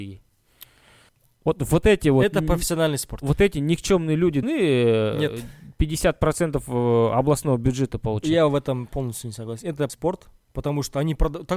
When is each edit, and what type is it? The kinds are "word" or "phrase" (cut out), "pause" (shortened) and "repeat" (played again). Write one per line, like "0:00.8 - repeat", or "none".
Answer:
0:01.1 - pause
0:04.4 - word
0:09.9 - word